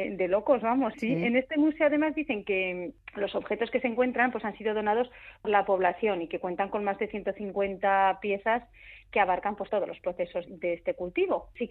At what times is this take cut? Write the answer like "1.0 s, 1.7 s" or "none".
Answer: 0.9 s, 5.4 s, 9.7 s, 10.5 s